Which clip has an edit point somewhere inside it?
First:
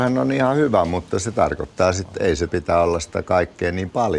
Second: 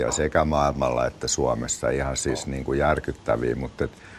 first; 1 cut; at 2.5 s

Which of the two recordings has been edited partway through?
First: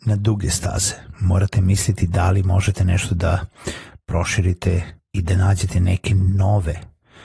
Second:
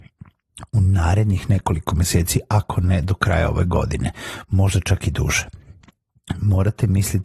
first; 1 cut; at 5.0 s

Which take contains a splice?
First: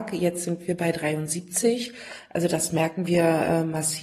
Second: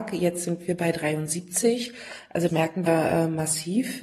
second; 2 cuts; at 2.5 s, 2.9 s

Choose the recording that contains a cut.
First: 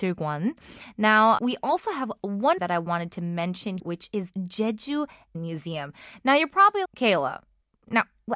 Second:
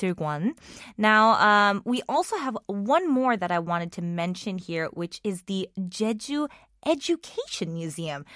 first; 6 cuts; at 1.4 s, 2.6 s, 3.8 s, 4.3 s, 5.3 s, 6.8 s

